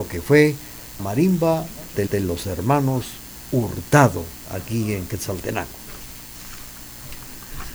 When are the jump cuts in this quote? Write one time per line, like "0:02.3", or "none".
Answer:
0:01.0
0:02.1